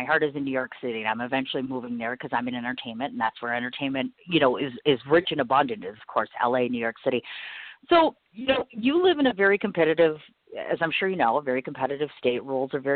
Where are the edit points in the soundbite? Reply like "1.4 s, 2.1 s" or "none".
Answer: none